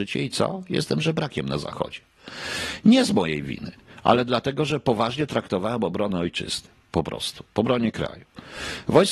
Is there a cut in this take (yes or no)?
yes